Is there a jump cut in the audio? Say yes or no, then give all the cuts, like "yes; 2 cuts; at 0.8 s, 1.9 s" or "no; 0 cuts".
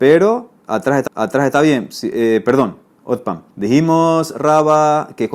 yes; 2 cuts; at 1.1 s, 3.5 s